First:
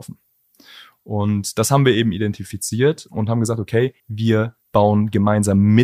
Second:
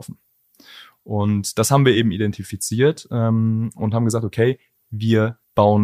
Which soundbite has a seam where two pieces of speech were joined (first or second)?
first